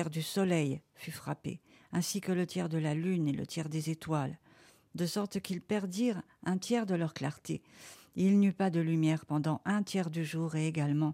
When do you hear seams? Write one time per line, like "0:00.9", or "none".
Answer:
none